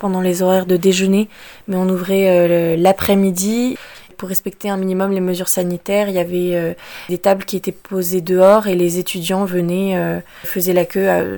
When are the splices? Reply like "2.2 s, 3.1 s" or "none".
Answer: none